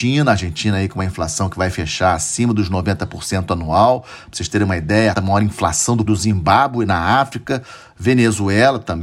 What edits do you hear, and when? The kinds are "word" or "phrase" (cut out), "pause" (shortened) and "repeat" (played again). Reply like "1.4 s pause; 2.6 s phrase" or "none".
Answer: 5.1 s phrase; 6.1 s phrase